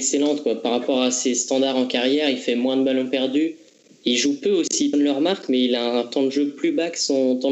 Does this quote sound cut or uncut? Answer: cut